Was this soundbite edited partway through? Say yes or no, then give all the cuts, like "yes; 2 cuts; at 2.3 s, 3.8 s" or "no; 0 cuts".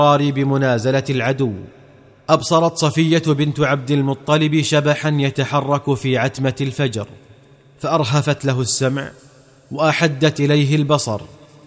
no; 0 cuts